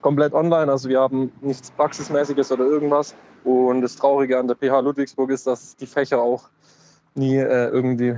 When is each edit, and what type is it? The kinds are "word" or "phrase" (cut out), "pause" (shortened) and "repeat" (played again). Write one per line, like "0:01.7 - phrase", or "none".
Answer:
0:03.3 - pause